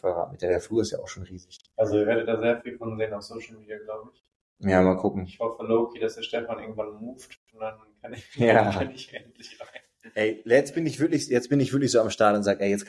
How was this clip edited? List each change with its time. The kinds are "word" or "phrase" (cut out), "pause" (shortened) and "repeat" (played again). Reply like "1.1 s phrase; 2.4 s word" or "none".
none